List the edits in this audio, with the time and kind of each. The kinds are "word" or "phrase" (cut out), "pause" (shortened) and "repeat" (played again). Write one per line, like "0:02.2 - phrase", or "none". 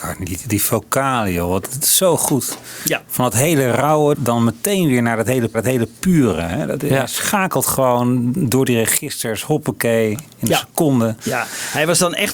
0:04.1 - word
0:05.5 - repeat